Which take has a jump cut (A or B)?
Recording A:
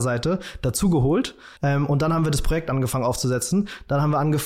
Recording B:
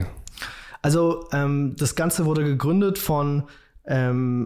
A